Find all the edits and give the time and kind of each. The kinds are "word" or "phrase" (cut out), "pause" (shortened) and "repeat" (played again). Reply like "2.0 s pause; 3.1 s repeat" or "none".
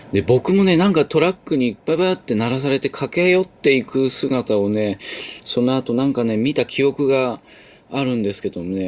none